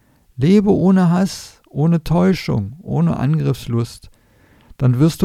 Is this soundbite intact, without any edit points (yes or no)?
yes